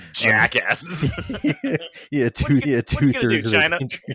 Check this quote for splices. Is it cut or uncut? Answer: cut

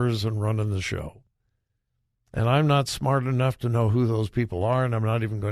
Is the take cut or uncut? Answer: uncut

